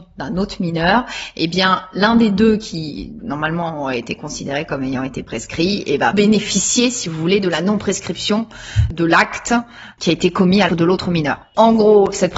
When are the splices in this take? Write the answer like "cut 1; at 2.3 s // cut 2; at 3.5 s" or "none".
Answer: cut 1; at 3.2 s // cut 2; at 6.1 s // cut 3; at 10.7 s